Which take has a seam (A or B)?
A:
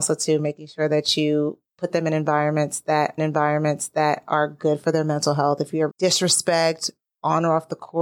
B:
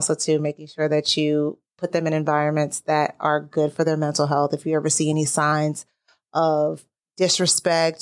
A